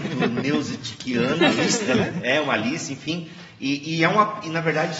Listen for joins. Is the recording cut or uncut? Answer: uncut